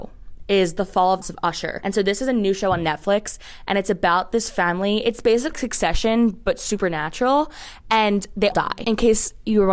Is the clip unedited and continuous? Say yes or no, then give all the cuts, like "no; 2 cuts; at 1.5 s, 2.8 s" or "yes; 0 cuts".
no; 3 cuts; at 1.2 s, 5.5 s, 8.5 s